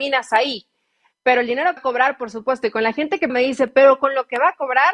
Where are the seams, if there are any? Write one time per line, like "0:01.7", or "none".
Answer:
0:01.8
0:03.3